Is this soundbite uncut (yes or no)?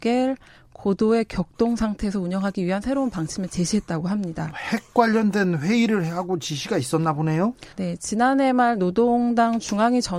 no